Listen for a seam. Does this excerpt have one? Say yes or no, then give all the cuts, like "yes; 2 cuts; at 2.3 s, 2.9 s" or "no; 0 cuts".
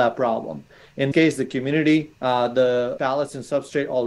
yes; 3 cuts; at 1.1 s, 2.2 s, 3.0 s